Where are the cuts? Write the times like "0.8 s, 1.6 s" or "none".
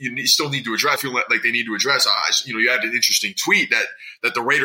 1.0 s